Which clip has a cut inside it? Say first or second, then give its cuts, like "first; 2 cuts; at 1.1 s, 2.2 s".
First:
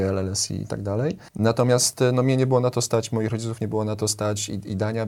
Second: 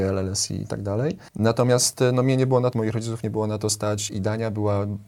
second; 2 cuts; at 2.7 s, 4.1 s